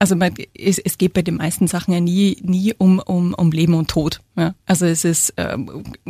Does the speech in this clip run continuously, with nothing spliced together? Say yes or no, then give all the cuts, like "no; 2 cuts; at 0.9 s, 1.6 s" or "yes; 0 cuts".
no; 1 cut; at 4.6 s